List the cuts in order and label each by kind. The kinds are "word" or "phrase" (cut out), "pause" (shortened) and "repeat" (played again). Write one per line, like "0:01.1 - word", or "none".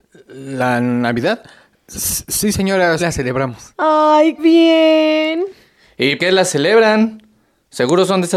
0:03.0 - word
0:04.4 - word
0:06.2 - word